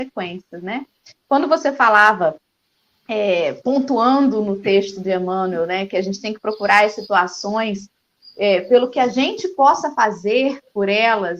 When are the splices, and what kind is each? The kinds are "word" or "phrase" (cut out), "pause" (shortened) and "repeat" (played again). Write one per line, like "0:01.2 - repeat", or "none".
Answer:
none